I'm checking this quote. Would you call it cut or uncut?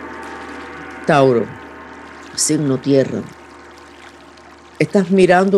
uncut